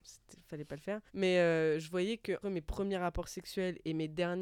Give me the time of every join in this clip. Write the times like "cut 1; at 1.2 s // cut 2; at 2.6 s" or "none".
cut 1; at 1.1 s // cut 2; at 2.4 s